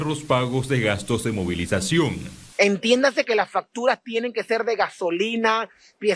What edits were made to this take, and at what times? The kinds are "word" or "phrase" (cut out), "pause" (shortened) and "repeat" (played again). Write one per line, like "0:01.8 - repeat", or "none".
0:02.5 - pause